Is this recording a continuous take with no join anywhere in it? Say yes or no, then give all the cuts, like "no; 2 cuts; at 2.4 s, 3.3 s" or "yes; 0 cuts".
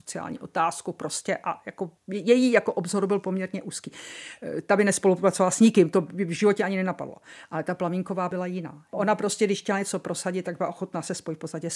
no; 1 cut; at 2.0 s